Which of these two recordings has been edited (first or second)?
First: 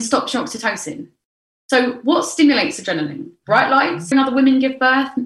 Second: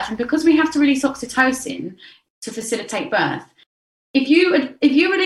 first